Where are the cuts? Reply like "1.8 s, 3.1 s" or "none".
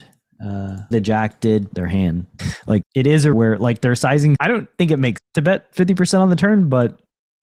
0.9 s, 1.7 s, 2.4 s, 2.8 s, 3.3 s, 4.4 s, 5.2 s